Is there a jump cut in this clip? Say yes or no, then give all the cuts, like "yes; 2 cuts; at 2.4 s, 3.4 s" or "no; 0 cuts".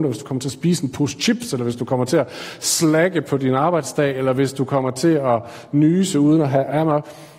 no; 0 cuts